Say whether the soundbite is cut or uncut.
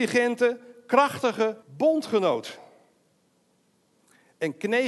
cut